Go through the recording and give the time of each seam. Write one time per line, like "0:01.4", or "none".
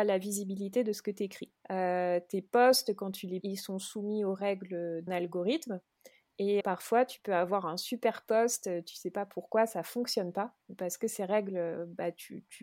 0:01.6
0:03.4
0:05.1
0:06.6